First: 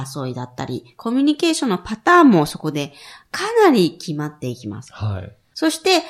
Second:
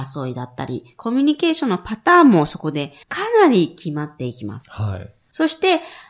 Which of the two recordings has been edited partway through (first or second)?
second